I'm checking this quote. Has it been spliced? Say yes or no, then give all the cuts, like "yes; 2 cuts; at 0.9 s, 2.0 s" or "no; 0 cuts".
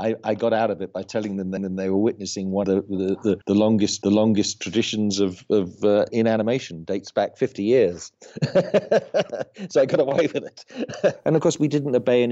yes; 5 cuts; at 1.6 s, 2.6 s, 3.4 s, 4.0 s, 6.1 s